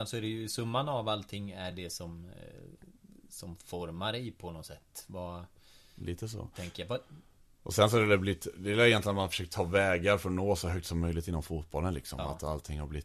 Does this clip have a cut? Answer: no; 0 cuts

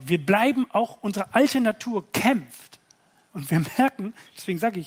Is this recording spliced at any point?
no; 0 cuts

